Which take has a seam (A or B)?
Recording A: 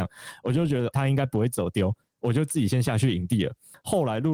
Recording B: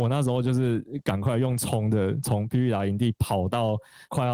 A